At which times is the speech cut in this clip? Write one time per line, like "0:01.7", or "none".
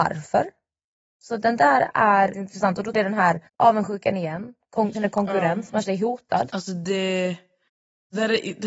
0:02.3
0:02.9
0:03.5
0:04.9
0:05.8